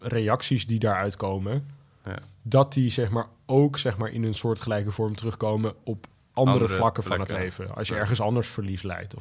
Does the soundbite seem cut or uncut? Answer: uncut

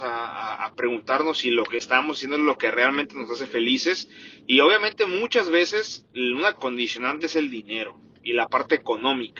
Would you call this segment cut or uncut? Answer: cut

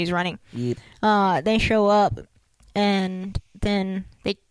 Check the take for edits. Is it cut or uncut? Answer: uncut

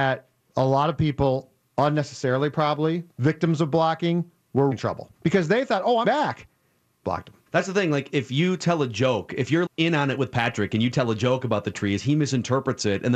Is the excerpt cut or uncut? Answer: cut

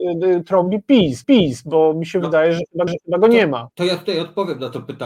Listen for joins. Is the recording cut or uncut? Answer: cut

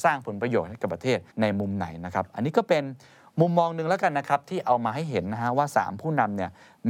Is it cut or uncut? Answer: cut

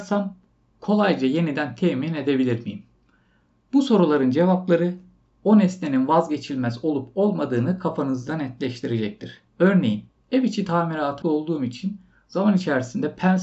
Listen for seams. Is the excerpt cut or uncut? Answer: cut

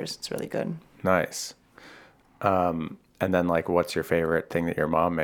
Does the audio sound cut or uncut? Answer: uncut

